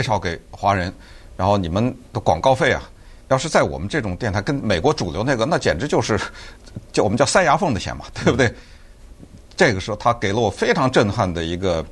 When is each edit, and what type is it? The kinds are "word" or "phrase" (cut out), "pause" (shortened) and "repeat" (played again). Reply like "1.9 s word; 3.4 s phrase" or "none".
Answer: 3.2 s pause

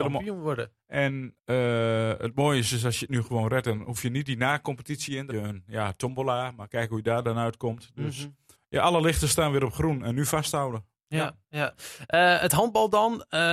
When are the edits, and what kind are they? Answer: 1.4 s pause; 5.3 s phrase; 8.5 s pause

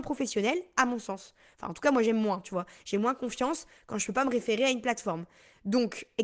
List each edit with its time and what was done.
none

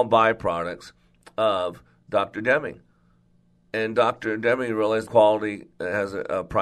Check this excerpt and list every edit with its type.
5.1 s word

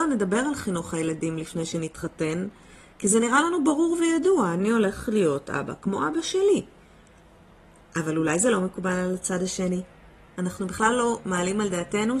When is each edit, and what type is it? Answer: none

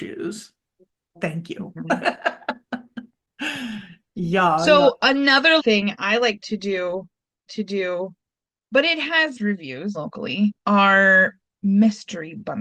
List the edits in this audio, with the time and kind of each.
5.6 s phrase; 7.5 s repeat; 9.4 s word; 9.9 s word; 10.6 s pause

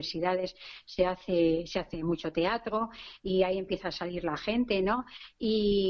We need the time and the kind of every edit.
none

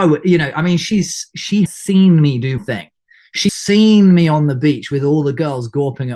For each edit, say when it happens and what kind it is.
1.7 s word; 2.6 s word; 3.5 s word

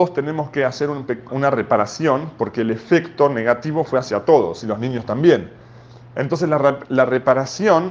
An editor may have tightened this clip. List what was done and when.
1.3 s word; 4.6 s phrase

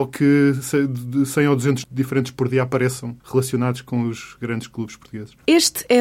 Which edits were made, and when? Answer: 1.8 s word; 3.2 s pause

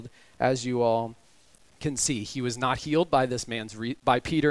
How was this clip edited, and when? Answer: none

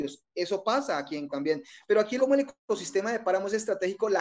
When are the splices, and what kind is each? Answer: 1.3 s word; 2.2 s phrase

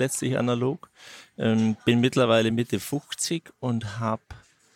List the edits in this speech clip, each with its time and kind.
none

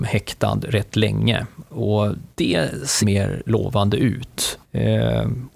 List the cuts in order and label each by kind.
2.3 s pause; 3.0 s word; 4.6 s pause

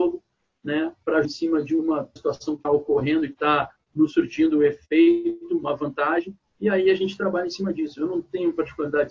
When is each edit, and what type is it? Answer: 1.2 s word; 2.2 s word; 2.6 s word

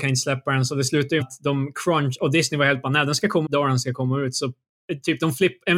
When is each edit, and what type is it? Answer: 1.2 s word; 3.5 s word

